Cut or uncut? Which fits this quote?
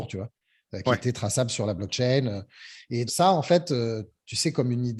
cut